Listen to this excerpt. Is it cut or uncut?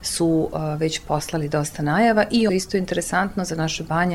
cut